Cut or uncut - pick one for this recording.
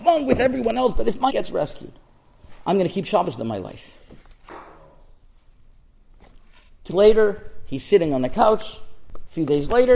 cut